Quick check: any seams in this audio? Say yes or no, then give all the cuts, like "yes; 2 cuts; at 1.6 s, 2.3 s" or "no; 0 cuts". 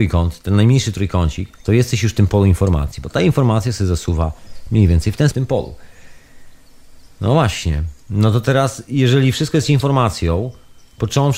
yes; 3 cuts; at 1.5 s, 5.3 s, 8.0 s